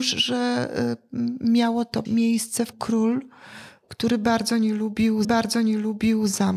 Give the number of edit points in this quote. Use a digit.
3